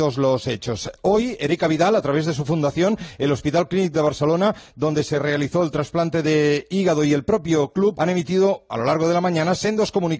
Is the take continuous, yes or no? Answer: no